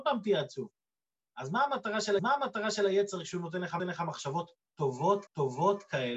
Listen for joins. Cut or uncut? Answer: cut